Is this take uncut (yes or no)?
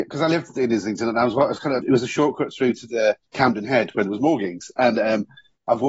no